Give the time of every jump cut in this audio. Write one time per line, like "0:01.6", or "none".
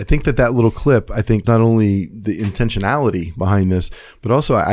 0:01.4